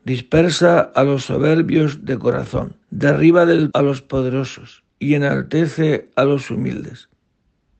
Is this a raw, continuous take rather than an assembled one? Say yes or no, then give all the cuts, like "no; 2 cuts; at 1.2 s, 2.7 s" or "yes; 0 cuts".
no; 3 cuts; at 2.8 s, 3.7 s, 4.9 s